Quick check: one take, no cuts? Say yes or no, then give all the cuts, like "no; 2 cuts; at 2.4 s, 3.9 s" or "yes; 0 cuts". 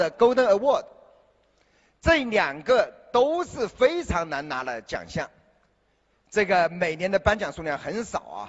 yes; 0 cuts